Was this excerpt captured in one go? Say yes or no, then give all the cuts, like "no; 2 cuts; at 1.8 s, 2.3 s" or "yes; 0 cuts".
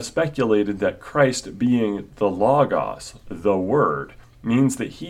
yes; 0 cuts